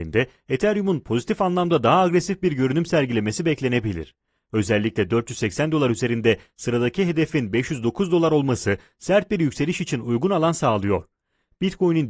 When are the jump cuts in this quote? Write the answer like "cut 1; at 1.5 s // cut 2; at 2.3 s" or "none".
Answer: none